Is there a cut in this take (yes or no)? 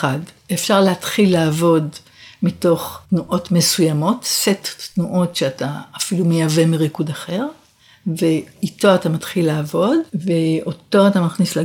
yes